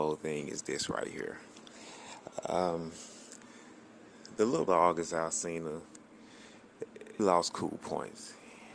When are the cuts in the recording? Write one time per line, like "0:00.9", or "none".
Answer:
0:04.7
0:07.2